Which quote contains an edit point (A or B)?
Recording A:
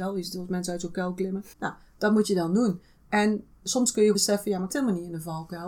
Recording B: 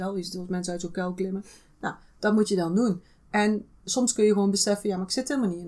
A